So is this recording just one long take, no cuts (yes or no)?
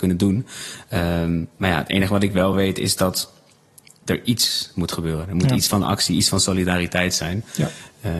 yes